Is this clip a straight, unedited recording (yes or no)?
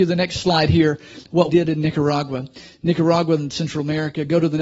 no